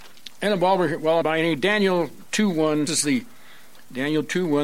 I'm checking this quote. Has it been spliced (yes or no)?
yes